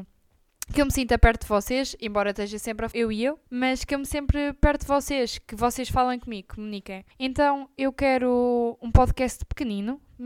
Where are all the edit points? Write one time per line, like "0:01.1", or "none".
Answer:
0:02.9
0:03.5
0:04.1
0:07.1